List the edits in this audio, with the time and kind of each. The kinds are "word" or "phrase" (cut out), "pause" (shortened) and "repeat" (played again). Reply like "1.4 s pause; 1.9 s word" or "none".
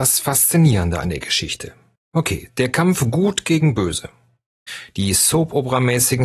2.0 s pause